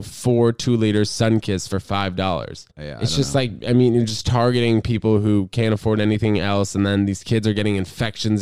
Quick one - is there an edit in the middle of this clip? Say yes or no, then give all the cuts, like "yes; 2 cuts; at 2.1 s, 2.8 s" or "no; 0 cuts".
yes; 1 cut; at 2.7 s